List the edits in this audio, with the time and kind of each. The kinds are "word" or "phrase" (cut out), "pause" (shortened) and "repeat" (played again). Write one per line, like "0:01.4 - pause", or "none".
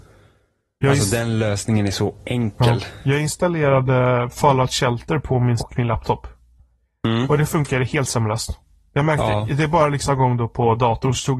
0:05.6 - word
0:10.1 - phrase